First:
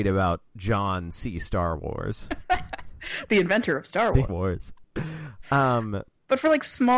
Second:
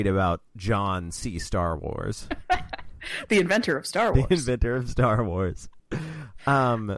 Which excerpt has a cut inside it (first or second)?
first